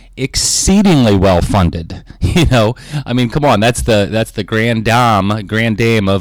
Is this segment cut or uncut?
uncut